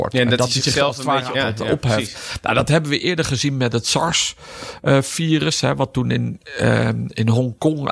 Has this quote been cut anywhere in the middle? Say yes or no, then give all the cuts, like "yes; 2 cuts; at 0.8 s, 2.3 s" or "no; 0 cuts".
yes; 1 cut; at 1.3 s